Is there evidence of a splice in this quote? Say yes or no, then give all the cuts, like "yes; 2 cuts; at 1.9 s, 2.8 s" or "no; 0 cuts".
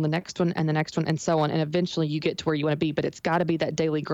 no; 0 cuts